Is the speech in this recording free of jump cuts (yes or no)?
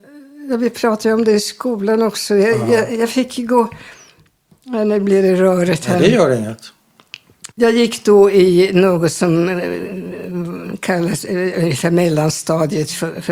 no